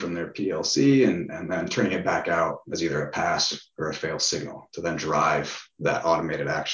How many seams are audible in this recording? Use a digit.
0